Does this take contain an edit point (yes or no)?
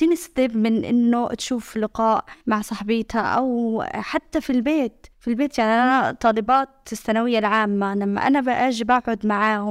yes